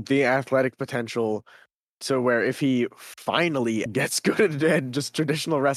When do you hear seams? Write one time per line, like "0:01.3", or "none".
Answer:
0:03.9